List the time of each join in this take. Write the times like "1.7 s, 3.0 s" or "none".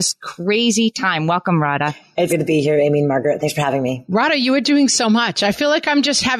2.3 s